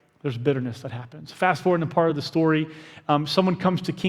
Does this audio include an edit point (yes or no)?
no